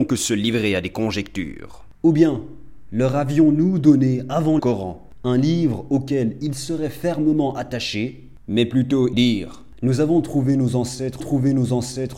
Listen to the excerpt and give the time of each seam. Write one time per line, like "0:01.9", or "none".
0:04.6
0:09.1
0:11.2